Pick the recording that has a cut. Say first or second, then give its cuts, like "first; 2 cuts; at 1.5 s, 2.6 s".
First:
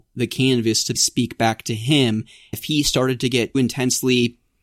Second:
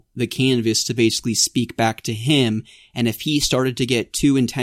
first; 3 cuts; at 0.9 s, 2.5 s, 3.5 s